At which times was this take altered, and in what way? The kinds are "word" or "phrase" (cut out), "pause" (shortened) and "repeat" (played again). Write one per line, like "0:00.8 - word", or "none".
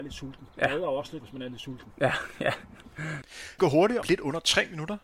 0:01.2 - word
0:03.6 - word
0:04.0 - word